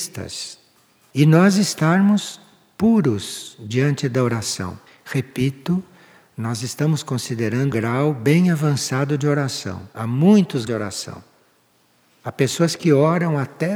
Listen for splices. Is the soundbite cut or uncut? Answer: cut